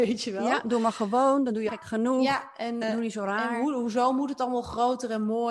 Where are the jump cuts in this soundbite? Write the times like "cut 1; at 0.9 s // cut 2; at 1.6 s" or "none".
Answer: cut 1; at 1.7 s // cut 2; at 2.8 s